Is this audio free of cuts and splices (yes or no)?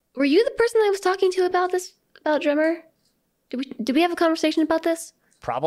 yes